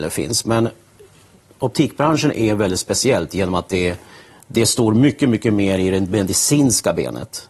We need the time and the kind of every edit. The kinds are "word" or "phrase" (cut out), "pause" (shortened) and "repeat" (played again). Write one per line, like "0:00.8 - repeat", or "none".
none